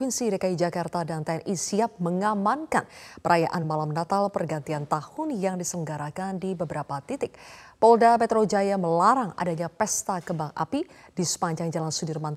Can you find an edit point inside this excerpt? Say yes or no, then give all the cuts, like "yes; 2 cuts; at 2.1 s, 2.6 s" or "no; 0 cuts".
no; 0 cuts